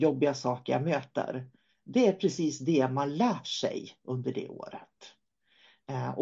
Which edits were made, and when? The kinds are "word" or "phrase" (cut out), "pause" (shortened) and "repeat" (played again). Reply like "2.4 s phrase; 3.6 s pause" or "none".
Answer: none